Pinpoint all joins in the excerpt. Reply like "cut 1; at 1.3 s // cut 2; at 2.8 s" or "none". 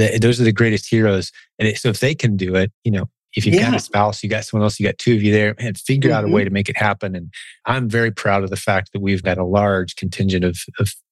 cut 1; at 2.7 s // cut 2; at 9.2 s